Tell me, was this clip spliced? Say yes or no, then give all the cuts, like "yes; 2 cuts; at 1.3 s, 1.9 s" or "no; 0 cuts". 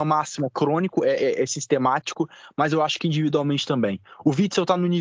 no; 0 cuts